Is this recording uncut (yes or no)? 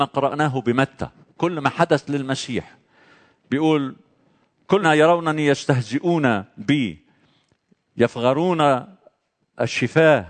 no